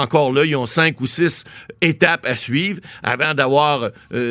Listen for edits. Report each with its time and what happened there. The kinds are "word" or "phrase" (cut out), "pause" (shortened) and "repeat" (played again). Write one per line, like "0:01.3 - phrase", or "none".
none